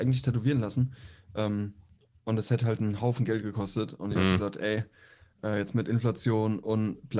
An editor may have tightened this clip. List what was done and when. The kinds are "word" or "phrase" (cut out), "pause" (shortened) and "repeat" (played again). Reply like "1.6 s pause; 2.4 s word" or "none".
none

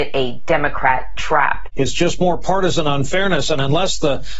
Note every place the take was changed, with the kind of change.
none

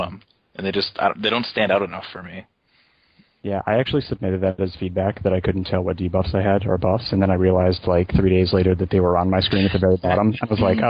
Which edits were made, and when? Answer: none

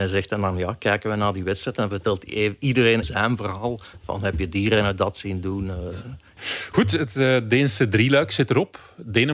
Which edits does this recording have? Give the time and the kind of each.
3.0 s word

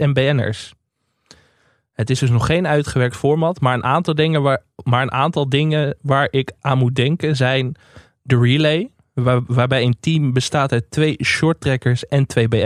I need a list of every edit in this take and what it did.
none

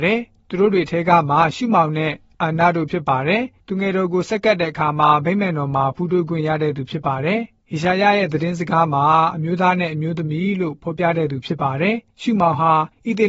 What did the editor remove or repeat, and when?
none

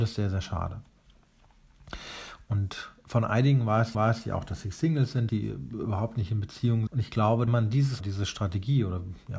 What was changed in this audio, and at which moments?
3.9 s repeat; 5.3 s word; 6.9 s word; 7.5 s phrase; 8.0 s word

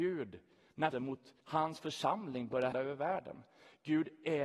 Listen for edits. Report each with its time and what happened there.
0.9 s word; 1.4 s pause; 2.7 s word

